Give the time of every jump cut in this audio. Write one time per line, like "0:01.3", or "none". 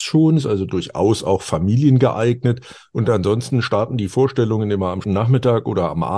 0:05.0